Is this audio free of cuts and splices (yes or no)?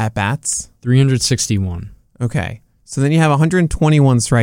yes